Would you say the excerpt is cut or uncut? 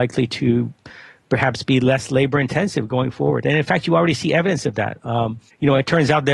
uncut